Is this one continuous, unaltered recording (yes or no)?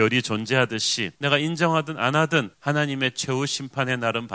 no